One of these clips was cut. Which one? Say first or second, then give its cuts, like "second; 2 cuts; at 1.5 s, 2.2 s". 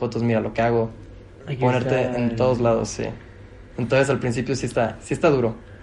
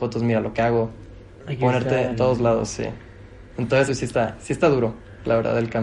second; 2 cuts; at 2.1 s, 3.9 s